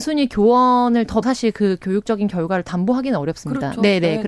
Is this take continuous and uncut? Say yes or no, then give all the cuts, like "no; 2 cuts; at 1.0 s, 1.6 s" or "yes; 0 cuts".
no; 1 cut; at 1.2 s